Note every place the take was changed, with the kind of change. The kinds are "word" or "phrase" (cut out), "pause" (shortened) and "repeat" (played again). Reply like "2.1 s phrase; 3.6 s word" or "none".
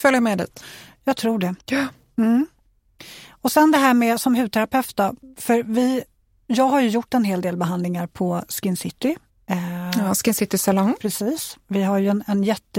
1.6 s pause; 9.3 s pause